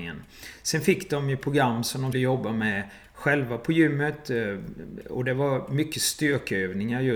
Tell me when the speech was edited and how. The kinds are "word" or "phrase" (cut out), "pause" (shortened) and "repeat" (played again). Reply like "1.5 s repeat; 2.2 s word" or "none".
2.1 s word